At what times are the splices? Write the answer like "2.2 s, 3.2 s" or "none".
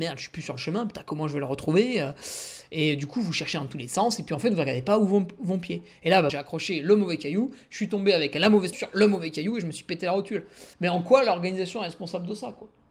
6.3 s, 8.7 s, 10.7 s